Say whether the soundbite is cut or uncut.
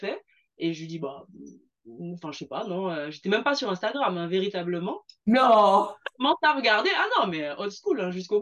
uncut